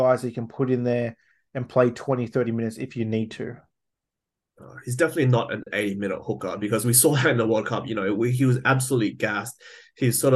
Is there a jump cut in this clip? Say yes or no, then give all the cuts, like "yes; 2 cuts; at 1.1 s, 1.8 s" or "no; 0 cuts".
no; 0 cuts